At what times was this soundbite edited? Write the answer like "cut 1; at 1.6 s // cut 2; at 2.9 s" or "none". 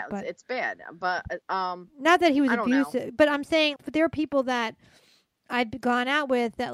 cut 1; at 1.4 s // cut 2; at 3.8 s

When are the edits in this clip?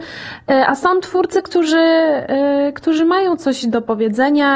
none

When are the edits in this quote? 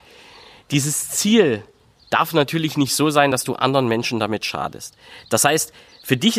none

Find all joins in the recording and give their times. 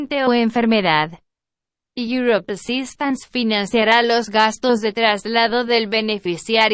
none

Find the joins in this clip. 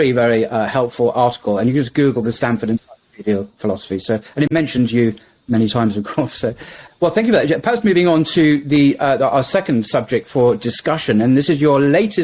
cut 1; at 6.9 s

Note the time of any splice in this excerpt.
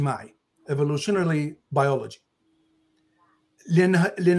none

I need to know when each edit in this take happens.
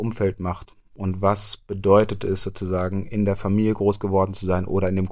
none

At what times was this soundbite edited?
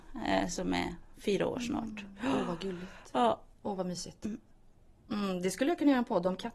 cut 1; at 3.5 s

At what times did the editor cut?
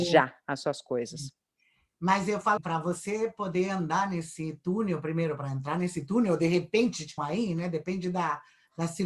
cut 1; at 2.6 s // cut 2; at 7.2 s

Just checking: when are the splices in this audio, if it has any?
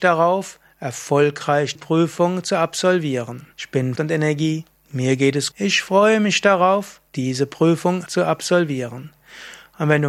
cut 1; at 1.7 s // cut 2; at 3.5 s // cut 3; at 4.0 s // cut 4; at 5.5 s // cut 5; at 7.1 s // cut 6; at 8.1 s

